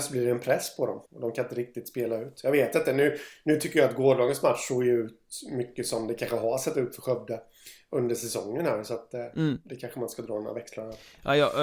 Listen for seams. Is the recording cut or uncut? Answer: cut